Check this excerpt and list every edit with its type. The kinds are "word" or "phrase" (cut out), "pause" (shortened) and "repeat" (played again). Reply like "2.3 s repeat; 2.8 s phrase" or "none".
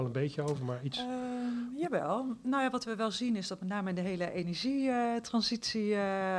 none

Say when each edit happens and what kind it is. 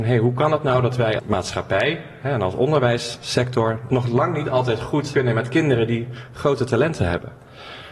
1.2 s word; 5.1 s word

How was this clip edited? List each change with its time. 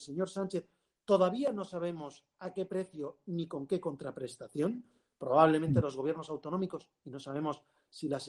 none

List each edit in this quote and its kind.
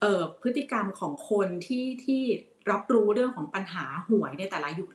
none

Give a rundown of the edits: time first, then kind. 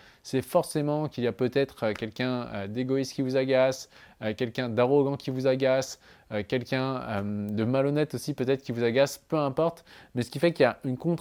none

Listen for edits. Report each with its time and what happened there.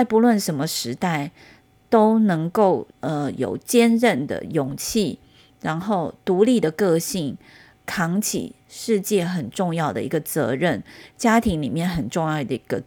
2.9 s pause

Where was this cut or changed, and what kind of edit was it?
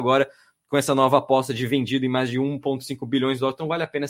none

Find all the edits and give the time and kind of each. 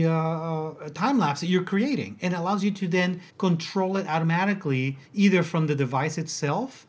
3.3 s pause; 5.1 s pause

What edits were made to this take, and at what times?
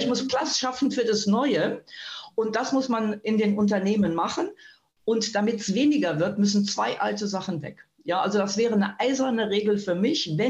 none

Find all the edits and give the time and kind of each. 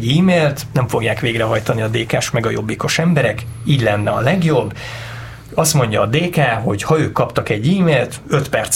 none

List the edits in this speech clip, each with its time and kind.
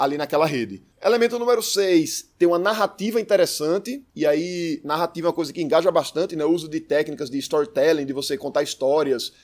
0.9 s pause; 4.1 s pause

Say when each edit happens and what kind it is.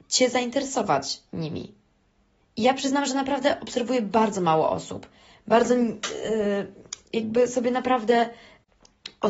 none

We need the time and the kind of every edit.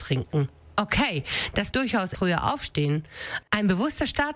1.7 s word; 2.1 s word

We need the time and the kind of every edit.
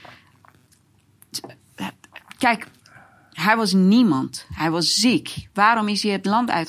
none

